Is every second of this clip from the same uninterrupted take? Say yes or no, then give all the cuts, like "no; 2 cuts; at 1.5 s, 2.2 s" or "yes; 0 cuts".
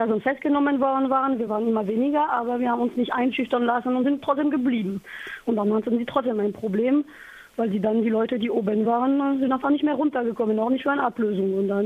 yes; 0 cuts